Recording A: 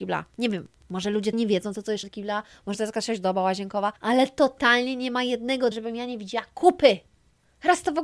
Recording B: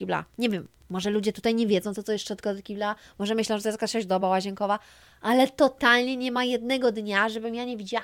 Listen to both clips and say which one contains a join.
A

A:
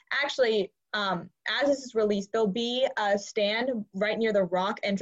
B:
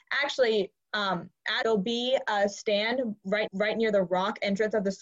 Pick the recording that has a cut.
B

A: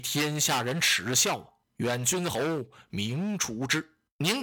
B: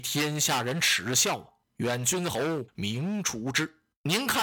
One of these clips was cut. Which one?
B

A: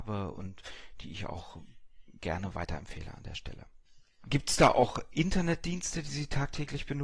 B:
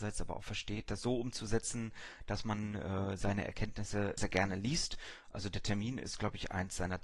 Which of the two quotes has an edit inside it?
B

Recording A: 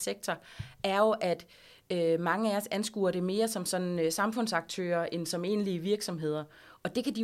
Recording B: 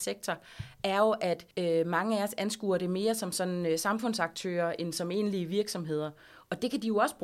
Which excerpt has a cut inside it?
B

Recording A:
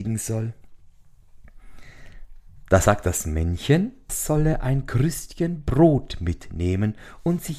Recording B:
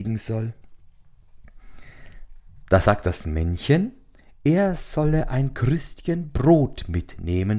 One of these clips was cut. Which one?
A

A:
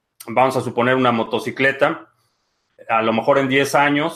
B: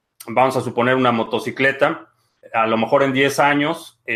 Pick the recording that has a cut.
B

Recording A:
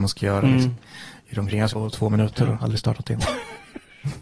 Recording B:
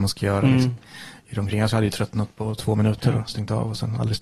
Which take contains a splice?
A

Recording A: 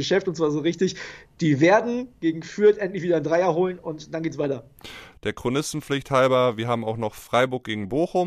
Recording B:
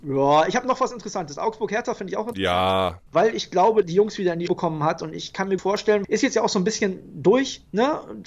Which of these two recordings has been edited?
B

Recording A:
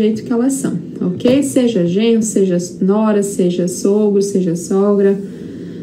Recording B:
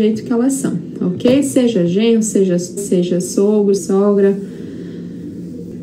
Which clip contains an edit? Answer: B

